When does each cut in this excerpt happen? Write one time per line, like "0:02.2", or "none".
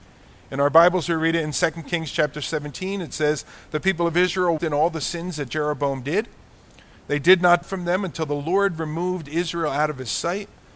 0:04.6
0:07.6